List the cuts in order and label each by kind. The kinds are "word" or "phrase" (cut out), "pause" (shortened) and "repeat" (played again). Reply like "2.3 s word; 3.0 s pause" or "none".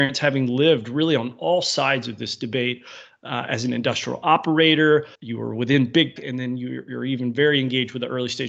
5.1 s pause; 6.2 s word